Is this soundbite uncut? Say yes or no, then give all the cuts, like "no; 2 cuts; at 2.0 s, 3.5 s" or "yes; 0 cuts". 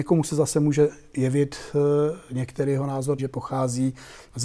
no; 1 cut; at 3.2 s